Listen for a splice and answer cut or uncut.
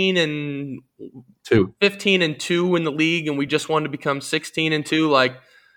uncut